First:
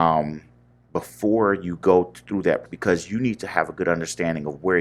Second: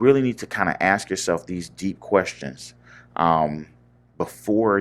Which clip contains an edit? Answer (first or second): first